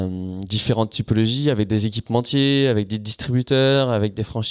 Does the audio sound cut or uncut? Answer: uncut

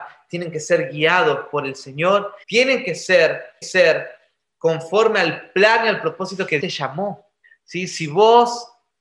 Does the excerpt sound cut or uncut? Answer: cut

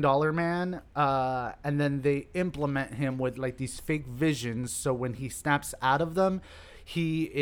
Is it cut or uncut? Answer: uncut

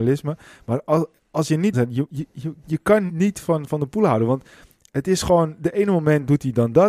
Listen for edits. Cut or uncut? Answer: cut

